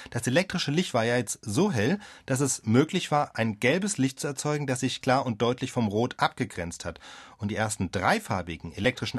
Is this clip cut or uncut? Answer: cut